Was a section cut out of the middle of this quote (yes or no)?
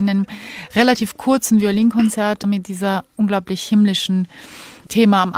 yes